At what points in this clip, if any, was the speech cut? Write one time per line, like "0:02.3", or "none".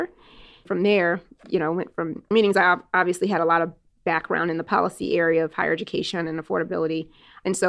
0:02.3